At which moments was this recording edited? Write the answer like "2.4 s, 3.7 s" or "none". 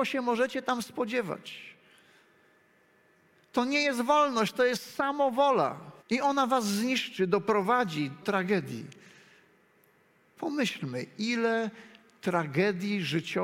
6.0 s, 8.2 s